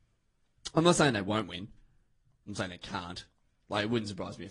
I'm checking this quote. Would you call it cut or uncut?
uncut